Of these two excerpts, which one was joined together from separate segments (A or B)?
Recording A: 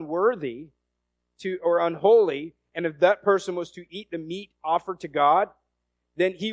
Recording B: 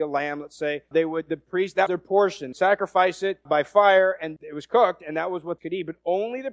B